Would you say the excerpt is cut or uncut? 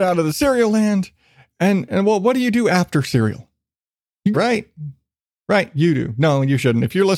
cut